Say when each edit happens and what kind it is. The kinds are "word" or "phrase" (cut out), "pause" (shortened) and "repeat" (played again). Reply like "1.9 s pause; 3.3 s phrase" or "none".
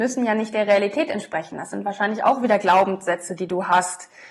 none